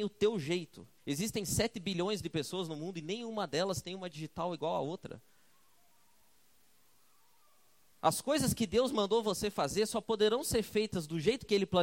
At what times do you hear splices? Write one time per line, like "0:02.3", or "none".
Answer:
0:01.0